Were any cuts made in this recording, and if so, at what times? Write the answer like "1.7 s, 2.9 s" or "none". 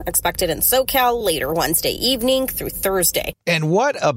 none